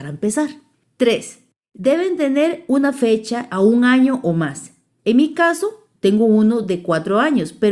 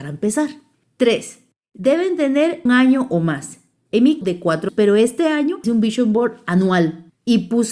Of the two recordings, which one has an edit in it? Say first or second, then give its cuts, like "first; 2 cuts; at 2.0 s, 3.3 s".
second; 4 cuts; at 2.7 s, 4.2 s, 4.7 s, 5.6 s